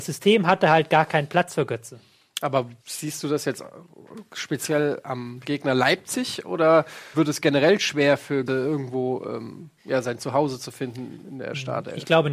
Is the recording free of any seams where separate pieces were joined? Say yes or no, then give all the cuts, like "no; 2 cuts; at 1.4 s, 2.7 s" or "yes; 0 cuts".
no; 4 cuts; at 2.8 s, 7.1 s, 8.5 s, 9.8 s